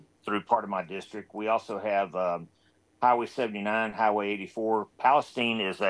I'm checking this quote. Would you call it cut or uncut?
uncut